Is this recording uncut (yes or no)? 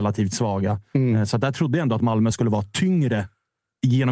yes